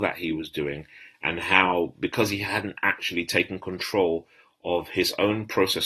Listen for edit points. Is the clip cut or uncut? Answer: uncut